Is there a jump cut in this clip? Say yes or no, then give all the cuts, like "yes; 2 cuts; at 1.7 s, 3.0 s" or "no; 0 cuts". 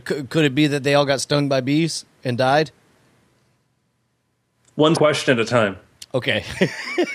yes; 1 cut; at 4.9 s